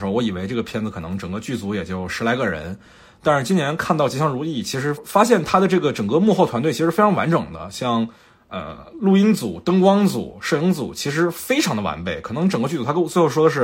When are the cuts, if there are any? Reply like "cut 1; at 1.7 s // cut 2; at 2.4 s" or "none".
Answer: none